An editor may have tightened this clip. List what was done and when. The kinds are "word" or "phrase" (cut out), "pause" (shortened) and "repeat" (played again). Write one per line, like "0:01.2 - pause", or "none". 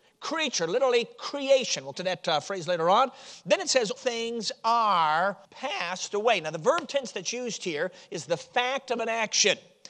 0:01.9 - phrase
0:04.0 - word
0:05.5 - pause